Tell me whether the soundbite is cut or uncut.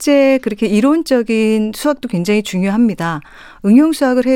uncut